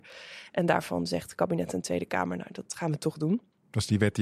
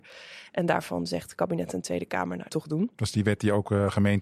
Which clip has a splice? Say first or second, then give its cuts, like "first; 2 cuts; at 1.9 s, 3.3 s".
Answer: second; 2 cuts; at 2.5 s, 2.9 s